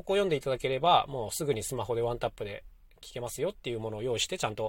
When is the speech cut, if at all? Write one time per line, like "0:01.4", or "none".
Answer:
none